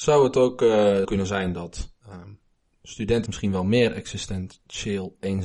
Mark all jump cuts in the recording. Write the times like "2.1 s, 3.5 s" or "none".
1.0 s, 2.0 s, 3.3 s